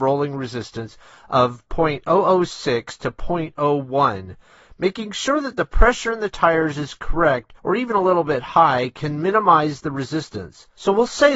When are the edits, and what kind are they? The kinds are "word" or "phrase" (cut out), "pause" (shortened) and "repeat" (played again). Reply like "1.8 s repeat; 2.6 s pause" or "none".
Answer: 7.6 s pause

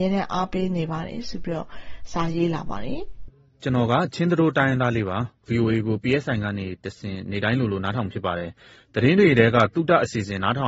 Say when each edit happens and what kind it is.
none

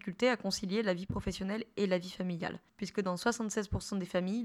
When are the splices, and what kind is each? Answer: 2.7 s pause

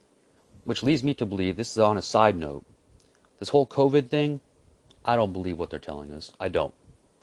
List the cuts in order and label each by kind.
none

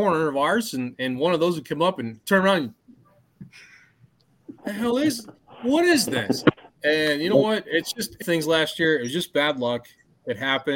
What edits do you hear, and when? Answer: 4.6 s pause; 6.7 s pause; 8.2 s phrase

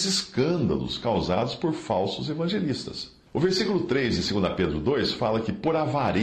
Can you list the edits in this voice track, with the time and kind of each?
3.3 s pause

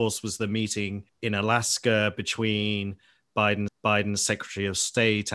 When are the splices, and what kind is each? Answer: 1.1 s pause; 3.7 s repeat

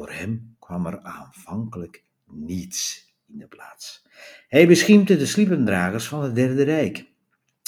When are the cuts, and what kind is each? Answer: none

